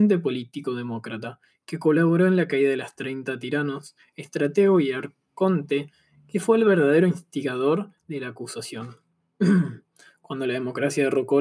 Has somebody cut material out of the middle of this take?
no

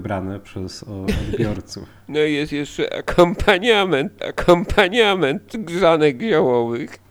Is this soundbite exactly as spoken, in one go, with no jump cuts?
no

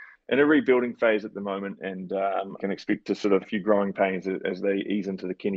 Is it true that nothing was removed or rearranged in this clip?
no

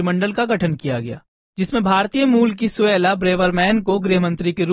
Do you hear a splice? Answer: no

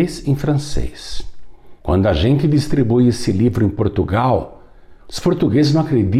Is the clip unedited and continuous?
no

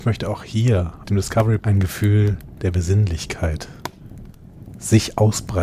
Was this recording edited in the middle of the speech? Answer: yes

